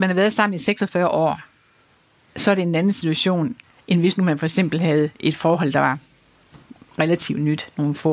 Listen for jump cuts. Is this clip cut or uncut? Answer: uncut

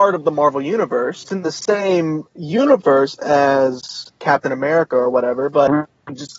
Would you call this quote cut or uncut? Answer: cut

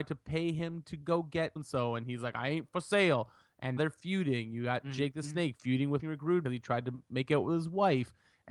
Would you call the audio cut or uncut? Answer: cut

